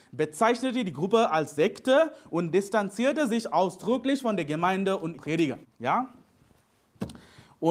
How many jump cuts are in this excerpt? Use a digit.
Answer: 2